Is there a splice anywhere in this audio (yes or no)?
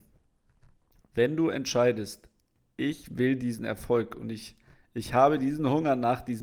no